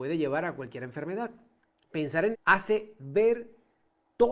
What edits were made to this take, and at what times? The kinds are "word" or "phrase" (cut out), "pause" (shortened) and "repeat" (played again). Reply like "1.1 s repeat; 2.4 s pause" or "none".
2.3 s word

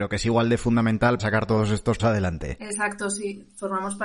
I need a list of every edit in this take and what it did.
1.2 s word; 2.0 s word

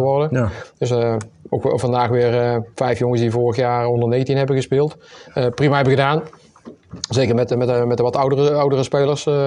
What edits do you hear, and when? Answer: none

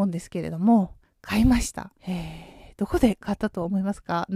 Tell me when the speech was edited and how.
2.0 s pause

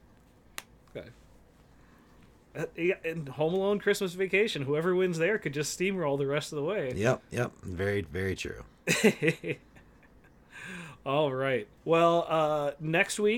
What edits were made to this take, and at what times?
11.8 s pause

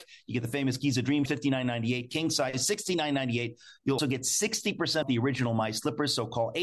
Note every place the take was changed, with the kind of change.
1.3 s phrase; 4.0 s word; 5.0 s word

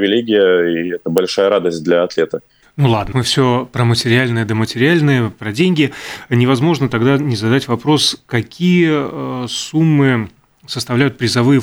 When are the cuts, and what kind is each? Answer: 2.6 s pause; 3.1 s word

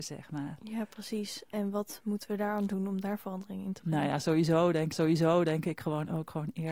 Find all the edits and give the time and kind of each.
4.9 s repeat

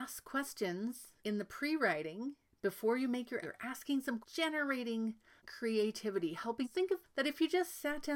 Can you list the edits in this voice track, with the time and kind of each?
1.2 s pause; 2.5 s pause; 3.4 s word; 4.2 s phrase; 5.4 s word; 6.6 s word; 7.0 s word

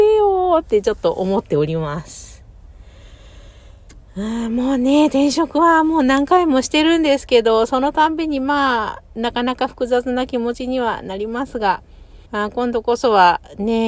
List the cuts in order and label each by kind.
12.2 s pause

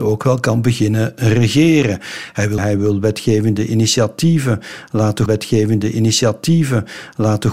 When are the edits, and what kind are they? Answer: 2.6 s phrase; 5.3 s repeat

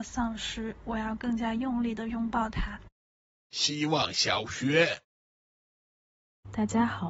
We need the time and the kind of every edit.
3.3 s pause

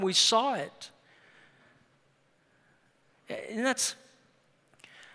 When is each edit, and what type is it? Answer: none

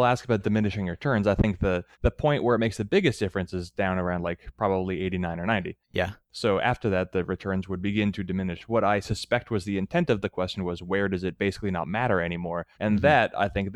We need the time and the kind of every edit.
1.9 s pause; 12.7 s pause

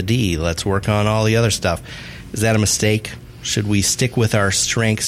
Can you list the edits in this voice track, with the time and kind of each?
none

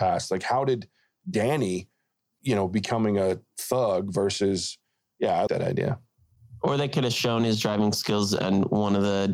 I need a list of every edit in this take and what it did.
5.5 s word

